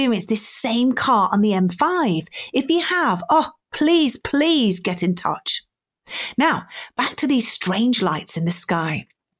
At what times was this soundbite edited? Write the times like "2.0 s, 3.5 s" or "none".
none